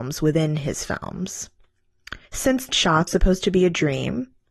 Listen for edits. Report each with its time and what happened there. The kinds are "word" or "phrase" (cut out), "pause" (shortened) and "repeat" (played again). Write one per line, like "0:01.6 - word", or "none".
0:02.2 - pause
0:02.7 - word
0:03.1 - word